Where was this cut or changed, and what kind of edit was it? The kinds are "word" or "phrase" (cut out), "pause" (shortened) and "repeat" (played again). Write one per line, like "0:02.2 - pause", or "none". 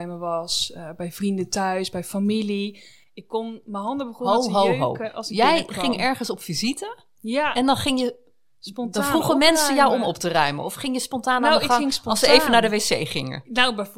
none